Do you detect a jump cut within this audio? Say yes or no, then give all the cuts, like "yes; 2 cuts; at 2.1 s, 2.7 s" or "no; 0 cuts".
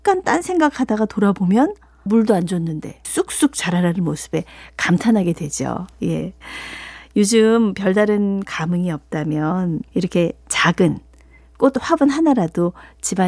yes; 4 cuts; at 2.1 s, 3.0 s, 8.5 s, 9.9 s